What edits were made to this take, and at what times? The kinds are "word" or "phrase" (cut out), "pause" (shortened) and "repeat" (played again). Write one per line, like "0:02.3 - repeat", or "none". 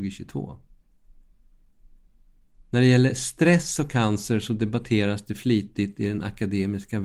0:02.6 - pause

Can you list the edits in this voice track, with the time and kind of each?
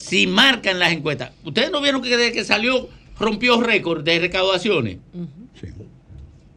0:01.3 - pause
0:05.5 - pause

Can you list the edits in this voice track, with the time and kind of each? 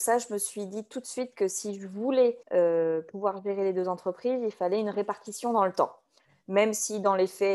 0:02.4 - pause

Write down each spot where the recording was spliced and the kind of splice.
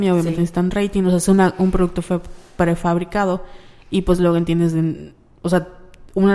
none

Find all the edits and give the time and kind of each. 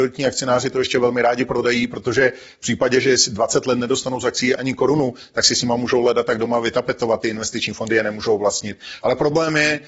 0:04.6 - word

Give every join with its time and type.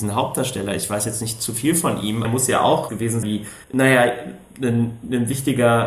0:02.2 - phrase
0:02.9 - phrase
0:03.2 - word
0:03.6 - pause

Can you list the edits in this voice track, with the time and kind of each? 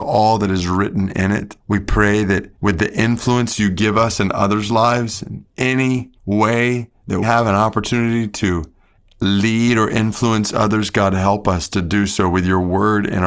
0:01.6 - pause
0:02.5 - pause
0:06.2 - pause
0:07.2 - word

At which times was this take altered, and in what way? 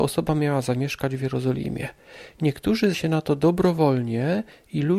0:02.9 - word

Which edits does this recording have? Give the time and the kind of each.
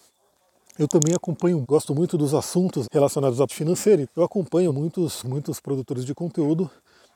0:01.6 - word
0:02.8 - word
0:03.5 - word
0:04.0 - word
0:04.7 - word
0:05.2 - word

